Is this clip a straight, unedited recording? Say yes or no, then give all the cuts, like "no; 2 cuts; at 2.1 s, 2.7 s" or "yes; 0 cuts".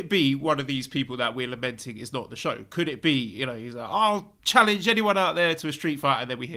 no; 1 cut; at 4.4 s